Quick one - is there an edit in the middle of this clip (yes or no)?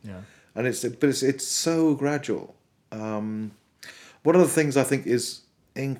no